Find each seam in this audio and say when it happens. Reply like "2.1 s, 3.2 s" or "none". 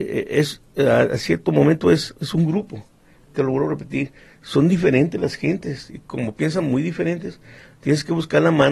none